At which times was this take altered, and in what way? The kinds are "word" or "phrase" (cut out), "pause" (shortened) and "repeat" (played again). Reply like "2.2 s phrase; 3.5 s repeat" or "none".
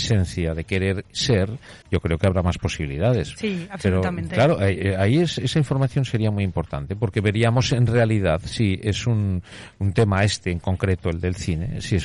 1.8 s pause